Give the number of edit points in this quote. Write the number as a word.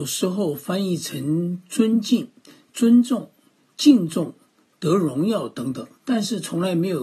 one